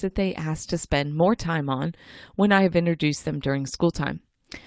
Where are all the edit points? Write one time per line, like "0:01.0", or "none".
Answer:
none